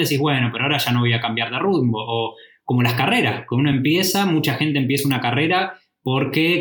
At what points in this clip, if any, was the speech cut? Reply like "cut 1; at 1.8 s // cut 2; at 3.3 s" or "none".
none